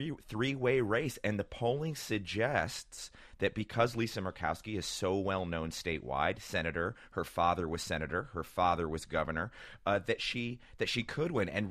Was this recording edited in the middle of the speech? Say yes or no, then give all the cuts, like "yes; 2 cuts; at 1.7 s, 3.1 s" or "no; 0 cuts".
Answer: no; 0 cuts